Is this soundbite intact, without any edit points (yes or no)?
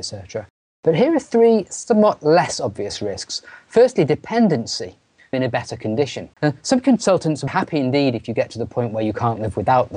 no